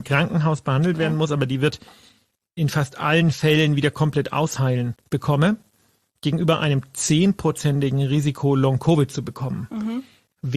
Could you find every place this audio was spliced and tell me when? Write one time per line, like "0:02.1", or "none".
none